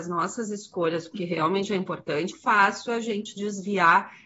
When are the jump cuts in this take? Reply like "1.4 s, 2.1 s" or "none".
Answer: 1.1 s, 2.3 s, 3.4 s